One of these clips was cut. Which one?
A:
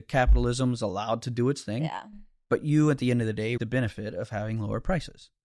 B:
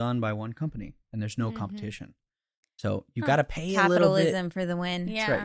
A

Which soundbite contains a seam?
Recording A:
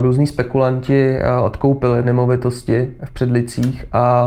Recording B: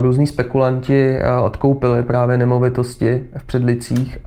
A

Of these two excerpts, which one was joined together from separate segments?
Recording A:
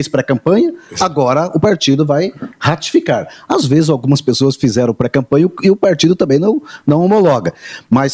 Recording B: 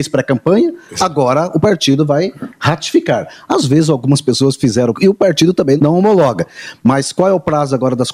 B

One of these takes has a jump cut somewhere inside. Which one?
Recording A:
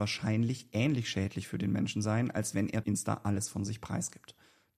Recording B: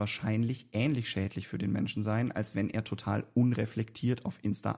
A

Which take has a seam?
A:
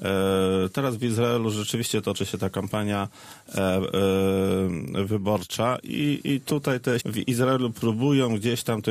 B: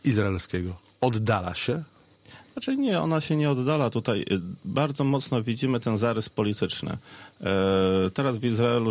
A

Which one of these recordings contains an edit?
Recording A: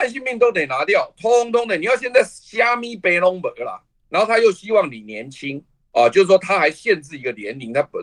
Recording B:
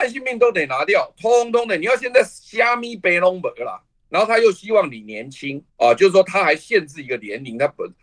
B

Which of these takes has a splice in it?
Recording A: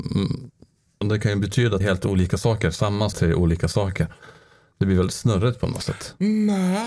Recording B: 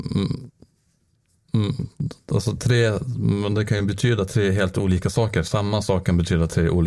A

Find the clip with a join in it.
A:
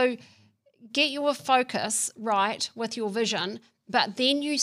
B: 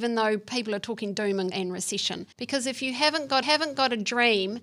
B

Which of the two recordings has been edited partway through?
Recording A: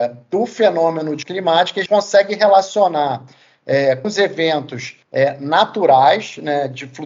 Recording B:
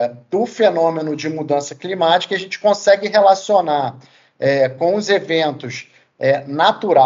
A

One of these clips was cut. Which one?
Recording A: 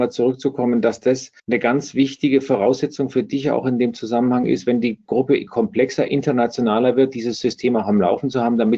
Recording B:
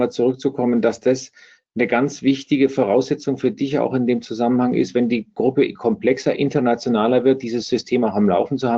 A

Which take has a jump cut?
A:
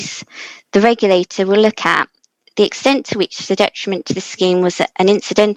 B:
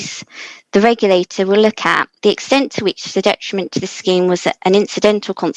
B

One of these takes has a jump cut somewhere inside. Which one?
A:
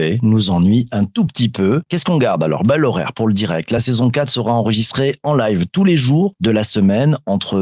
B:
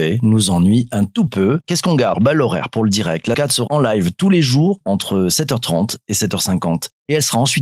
B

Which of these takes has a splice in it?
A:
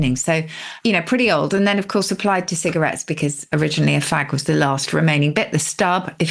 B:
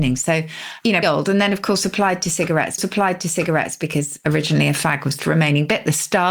B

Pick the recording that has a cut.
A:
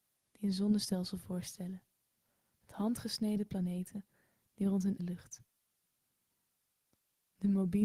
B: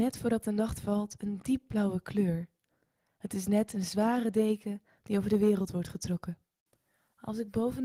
A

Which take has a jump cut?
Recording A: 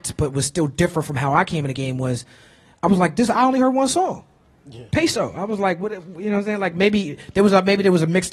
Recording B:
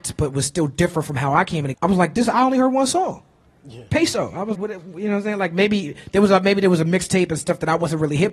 B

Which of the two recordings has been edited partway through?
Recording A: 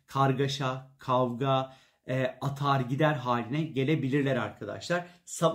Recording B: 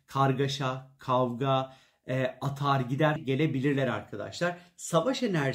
B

